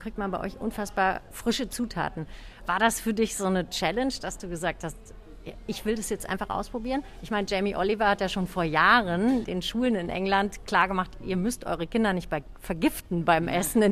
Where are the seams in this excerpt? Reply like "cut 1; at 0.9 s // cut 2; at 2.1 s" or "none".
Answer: none